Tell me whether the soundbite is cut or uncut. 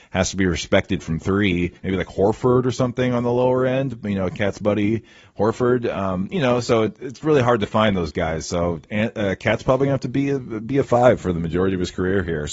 cut